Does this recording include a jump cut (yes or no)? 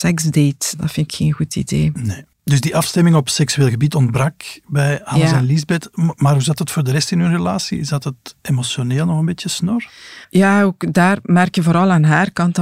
yes